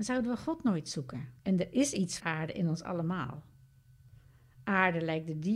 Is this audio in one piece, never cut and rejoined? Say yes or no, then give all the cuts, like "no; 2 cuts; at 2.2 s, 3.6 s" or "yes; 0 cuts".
no; 2 cuts; at 1.4 s, 2.2 s